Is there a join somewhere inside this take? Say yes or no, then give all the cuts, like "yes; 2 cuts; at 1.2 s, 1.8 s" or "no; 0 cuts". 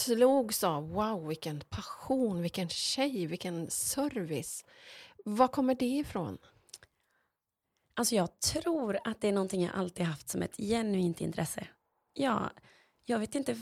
no; 0 cuts